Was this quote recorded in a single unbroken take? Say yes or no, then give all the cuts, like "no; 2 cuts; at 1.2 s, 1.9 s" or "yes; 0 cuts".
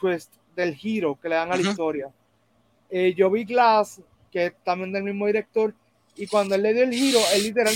yes; 0 cuts